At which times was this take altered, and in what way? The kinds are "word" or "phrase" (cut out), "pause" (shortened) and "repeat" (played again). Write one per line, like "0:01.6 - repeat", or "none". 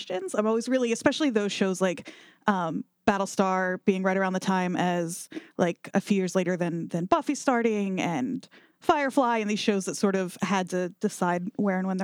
0:05.9 - word